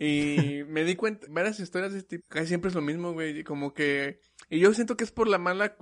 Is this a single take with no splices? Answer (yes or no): no